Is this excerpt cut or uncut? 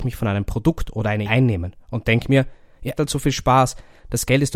cut